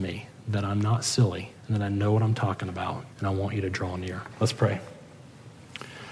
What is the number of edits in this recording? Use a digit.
3